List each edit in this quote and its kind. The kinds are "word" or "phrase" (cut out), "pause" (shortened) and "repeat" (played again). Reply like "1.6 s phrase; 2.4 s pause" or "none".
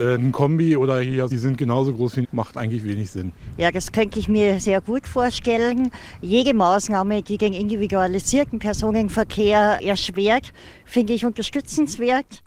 1.3 s phrase; 2.2 s phrase; 4.6 s word